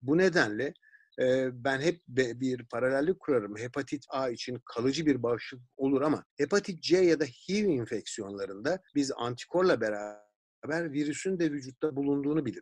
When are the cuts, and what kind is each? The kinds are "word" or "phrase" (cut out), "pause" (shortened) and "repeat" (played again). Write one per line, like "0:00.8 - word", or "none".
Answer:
0:04.1 - phrase
0:06.3 - pause
0:08.9 - pause